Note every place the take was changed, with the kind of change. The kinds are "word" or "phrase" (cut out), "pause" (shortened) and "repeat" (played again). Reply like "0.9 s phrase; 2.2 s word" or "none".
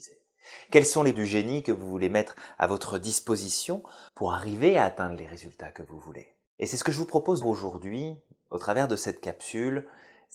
1.1 s word; 4.1 s pause; 6.5 s pause; 7.4 s phrase

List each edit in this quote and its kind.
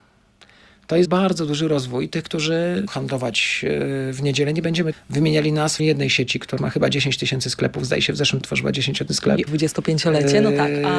1.0 s word; 2.9 s word; 4.9 s word; 5.8 s word; 6.6 s word; 8.4 s word; 9.1 s word; 9.5 s word

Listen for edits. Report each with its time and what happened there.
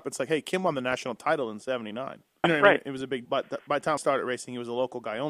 2.4 s word; 3.2 s word; 4.0 s word

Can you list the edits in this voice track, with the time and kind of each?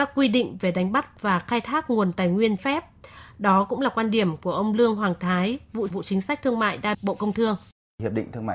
2.6 s word; 5.9 s word; 6.9 s word

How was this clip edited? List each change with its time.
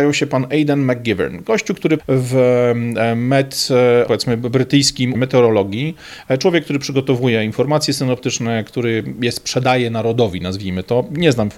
2.0 s word; 4.1 s phrase; 5.1 s word

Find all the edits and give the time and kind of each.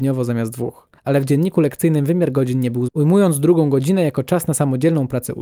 1.0 s pause; 2.9 s word

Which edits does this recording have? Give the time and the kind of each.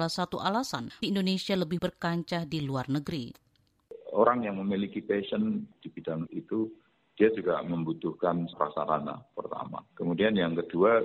1.0 s word; 1.8 s word; 6.3 s word; 8.5 s word; 9.9 s pause

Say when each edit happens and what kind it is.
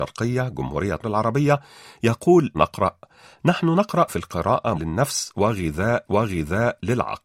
1.0 s word; 2.5 s word; 4.1 s word; 4.7 s word; 6.1 s repeat

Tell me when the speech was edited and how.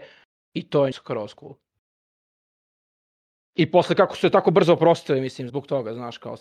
0.9 s word; 5.5 s word

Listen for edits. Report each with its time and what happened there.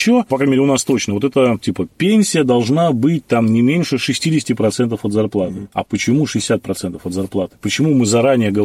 none

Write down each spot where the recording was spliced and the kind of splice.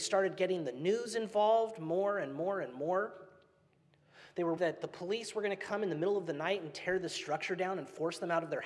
4.6 s word

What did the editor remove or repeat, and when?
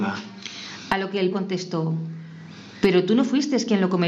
1.3 s word

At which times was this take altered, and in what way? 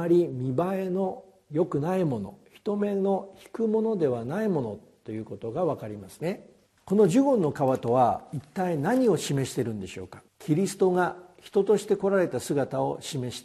6.7 s pause; 10.3 s pause

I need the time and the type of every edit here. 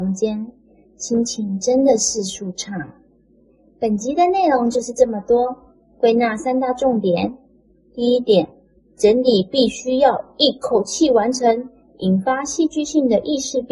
none

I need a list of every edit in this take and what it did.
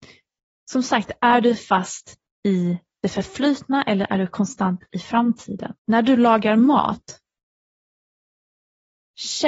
5.8 s pause

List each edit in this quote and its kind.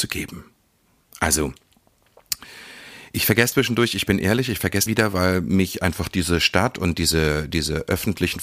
3.5 s word; 4.9 s phrase

